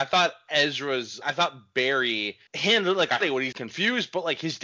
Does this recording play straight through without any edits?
no; 4 cuts; at 1.2 s, 2.5 s, 3.2 s, 3.5 s

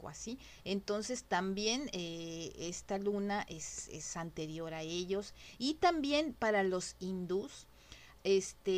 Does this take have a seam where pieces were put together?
no; 0 cuts

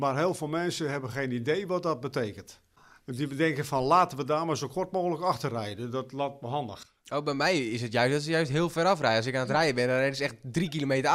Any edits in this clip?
no; 0 cuts

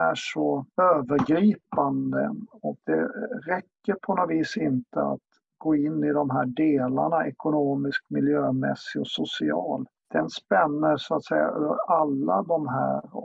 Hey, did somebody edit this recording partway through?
no; 0 cuts

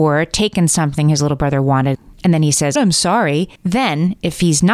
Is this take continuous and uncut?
no; 1 cut; at 2.8 s

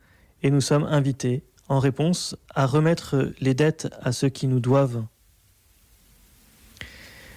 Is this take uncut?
yes; 0 cuts

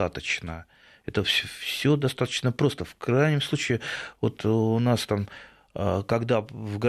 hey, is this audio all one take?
yes; 0 cuts

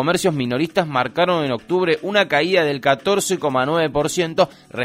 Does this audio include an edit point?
no; 0 cuts

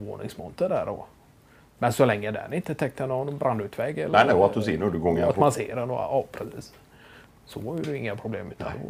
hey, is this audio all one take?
yes; 0 cuts

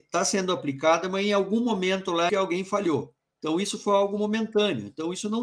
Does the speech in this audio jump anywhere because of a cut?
yes; 2 cuts; at 2.3 s, 3.2 s

